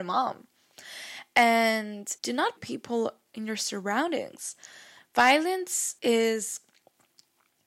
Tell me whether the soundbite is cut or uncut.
cut